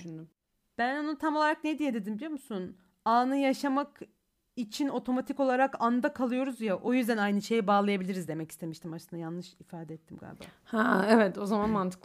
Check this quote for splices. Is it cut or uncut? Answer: uncut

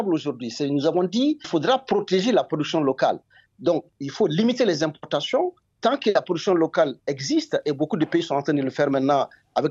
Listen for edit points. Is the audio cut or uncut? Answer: cut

